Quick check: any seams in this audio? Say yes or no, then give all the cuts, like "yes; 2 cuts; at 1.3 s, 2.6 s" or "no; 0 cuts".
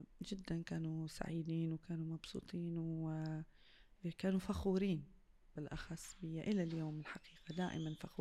no; 0 cuts